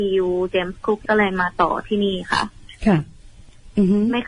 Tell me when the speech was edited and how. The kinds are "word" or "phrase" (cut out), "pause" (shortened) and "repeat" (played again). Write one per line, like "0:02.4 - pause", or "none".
0:01.1 - word